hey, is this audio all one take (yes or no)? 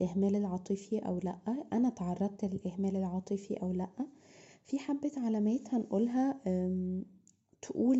yes